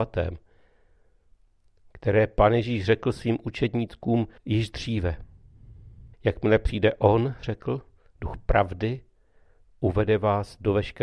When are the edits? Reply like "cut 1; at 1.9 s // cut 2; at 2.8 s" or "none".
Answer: cut 1; at 4.4 s // cut 2; at 6.1 s